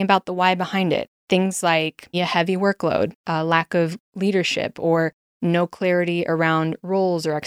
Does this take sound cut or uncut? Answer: cut